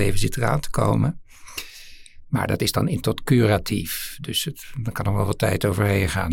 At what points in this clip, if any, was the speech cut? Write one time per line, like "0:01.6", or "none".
0:03.0